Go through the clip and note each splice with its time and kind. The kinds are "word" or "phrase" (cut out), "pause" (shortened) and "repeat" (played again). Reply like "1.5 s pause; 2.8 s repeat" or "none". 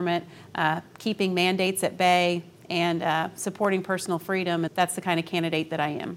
4.7 s word